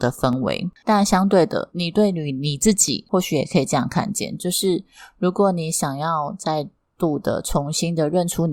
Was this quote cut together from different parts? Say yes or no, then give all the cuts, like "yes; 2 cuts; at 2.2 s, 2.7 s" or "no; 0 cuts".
no; 0 cuts